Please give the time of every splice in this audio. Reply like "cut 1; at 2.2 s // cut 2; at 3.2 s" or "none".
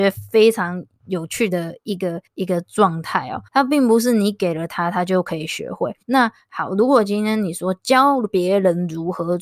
cut 1; at 2.3 s // cut 2; at 3.5 s // cut 3; at 6.0 s